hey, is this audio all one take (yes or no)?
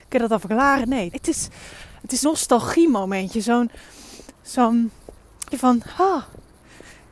no